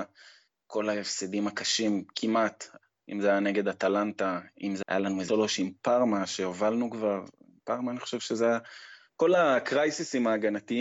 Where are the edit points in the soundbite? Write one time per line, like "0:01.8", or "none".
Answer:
0:04.8
0:05.3